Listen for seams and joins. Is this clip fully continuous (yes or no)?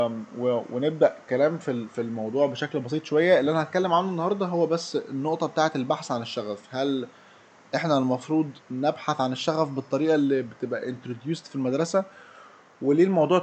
no